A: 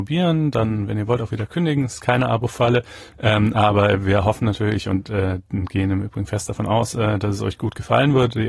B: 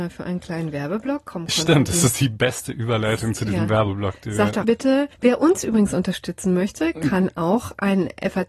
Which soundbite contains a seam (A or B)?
B